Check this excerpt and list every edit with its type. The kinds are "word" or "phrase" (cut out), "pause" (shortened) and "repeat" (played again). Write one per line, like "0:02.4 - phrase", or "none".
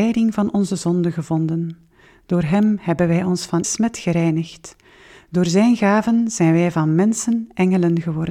0:03.6 - word